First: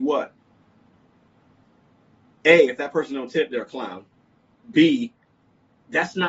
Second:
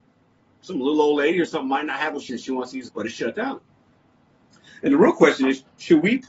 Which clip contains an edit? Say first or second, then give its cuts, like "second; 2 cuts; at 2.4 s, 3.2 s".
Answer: second; 2 cuts; at 2.3 s, 2.9 s